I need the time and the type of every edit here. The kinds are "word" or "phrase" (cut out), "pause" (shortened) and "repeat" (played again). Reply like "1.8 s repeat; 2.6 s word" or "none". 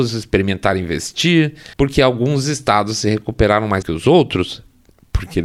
1.7 s pause; 3.8 s word